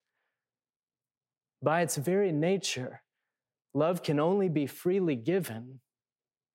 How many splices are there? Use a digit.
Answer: 0